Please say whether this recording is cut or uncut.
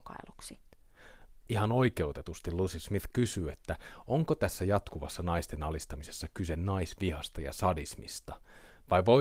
uncut